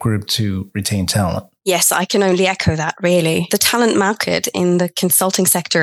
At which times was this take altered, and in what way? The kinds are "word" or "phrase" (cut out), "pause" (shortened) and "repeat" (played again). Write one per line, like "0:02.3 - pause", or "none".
none